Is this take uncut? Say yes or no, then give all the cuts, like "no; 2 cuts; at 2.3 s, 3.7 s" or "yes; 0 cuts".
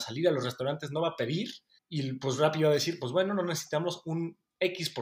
no; 1 cut; at 1.8 s